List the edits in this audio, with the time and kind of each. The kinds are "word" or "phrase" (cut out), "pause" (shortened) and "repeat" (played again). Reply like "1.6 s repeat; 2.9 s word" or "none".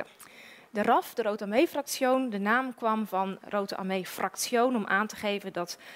none